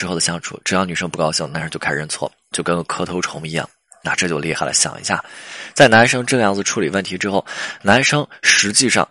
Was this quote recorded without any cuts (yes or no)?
yes